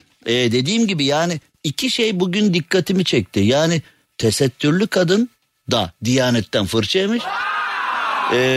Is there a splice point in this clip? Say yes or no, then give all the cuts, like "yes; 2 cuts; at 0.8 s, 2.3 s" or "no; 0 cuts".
no; 0 cuts